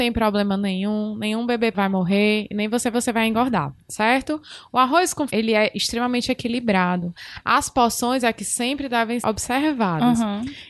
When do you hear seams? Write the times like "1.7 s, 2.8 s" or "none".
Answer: 1.7 s, 2.9 s, 5.3 s, 9.2 s